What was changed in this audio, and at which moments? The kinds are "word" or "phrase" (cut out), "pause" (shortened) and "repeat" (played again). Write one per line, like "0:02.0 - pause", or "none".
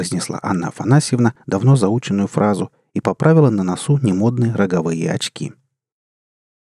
none